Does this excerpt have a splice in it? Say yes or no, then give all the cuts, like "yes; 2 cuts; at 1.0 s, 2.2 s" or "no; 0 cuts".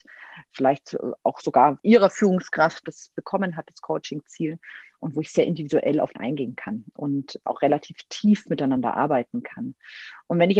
yes; 4 cuts; at 1.8 s, 2.8 s, 6.1 s, 7.5 s